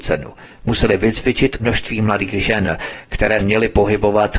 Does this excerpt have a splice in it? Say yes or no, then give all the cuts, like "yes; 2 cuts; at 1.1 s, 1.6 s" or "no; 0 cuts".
yes; 2 cuts; at 1.6 s, 3.4 s